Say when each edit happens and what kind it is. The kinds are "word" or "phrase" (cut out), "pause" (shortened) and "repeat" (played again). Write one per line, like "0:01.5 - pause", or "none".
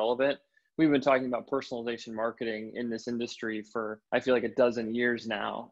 0:04.1 - pause